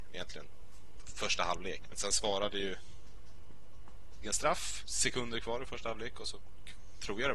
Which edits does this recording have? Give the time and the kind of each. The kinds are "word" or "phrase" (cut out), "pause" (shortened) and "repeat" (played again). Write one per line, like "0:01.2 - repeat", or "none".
0:01.9 - word
0:04.2 - phrase
0:04.8 - word